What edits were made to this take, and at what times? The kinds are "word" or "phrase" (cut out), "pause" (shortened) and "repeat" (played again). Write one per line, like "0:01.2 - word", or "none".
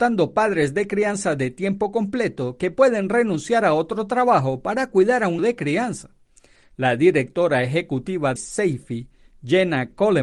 0:05.4 - word
0:08.4 - word